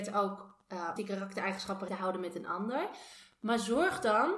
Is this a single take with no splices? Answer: no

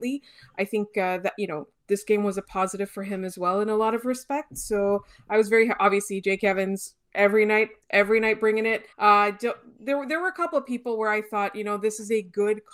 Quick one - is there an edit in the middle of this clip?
yes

